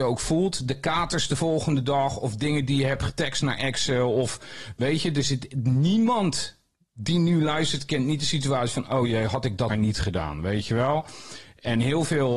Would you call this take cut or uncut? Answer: cut